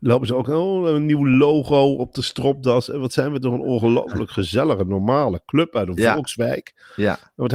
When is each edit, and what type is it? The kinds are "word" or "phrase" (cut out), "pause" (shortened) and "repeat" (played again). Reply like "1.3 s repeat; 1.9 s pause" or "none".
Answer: none